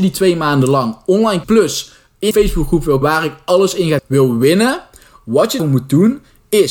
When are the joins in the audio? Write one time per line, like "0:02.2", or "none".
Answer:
0:01.4
0:02.3
0:03.0
0:04.0
0:05.6